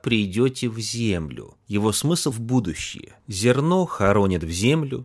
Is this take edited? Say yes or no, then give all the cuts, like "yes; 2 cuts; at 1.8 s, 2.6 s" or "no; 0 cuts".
yes; 2 cuts; at 1.6 s, 2.3 s